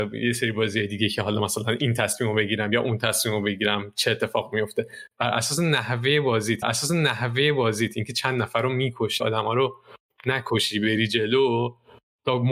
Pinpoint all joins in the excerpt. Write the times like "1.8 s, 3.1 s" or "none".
6.6 s, 9.2 s

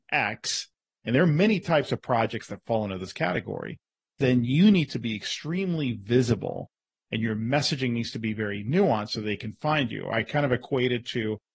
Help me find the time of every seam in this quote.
none

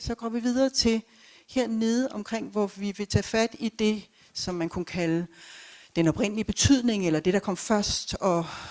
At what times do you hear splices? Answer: none

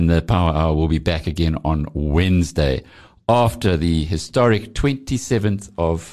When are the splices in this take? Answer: none

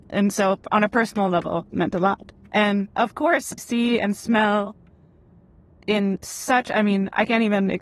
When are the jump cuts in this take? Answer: 1.7 s, 2.9 s, 3.6 s

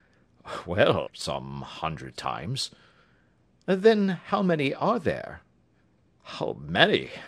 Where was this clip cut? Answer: 1.1 s, 2.2 s

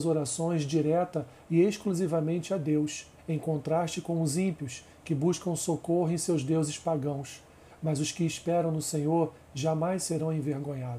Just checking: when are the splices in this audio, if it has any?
3.2 s

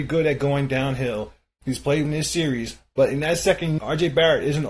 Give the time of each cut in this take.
2.0 s, 3.8 s

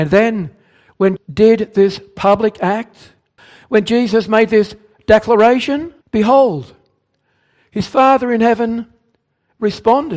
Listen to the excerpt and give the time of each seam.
1.2 s, 3.4 s, 6.0 s

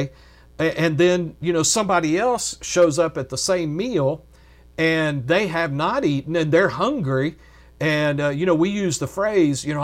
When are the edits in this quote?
none

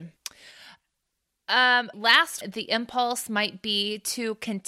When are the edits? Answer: 1.9 s, 2.4 s

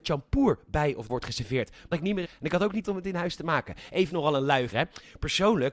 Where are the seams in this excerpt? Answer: 1.1 s, 1.9 s, 2.2 s, 2.8 s, 4.1 s, 4.7 s

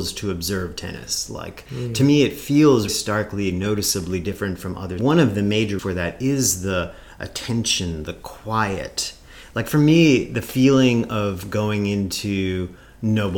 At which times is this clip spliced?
2.9 s, 5.0 s, 5.8 s

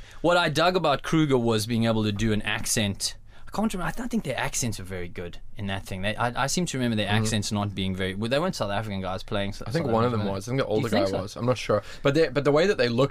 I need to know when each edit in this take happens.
none

